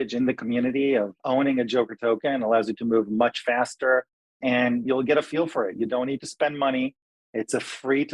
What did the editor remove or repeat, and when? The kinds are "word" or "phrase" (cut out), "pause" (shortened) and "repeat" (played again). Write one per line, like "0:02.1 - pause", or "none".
none